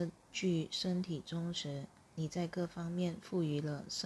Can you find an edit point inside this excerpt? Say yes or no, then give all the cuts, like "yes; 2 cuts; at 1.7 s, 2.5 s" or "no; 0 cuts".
yes; 1 cut; at 2.0 s